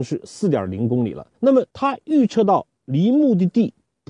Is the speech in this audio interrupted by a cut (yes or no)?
yes